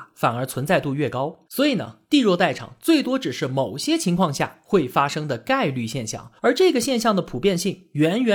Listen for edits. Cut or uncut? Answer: cut